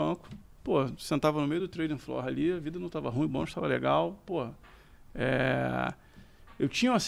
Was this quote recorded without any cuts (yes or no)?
yes